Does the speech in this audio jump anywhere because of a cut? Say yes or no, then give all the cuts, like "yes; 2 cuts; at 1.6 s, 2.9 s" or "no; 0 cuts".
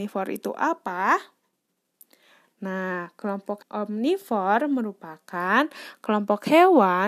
yes; 1 cut; at 3.6 s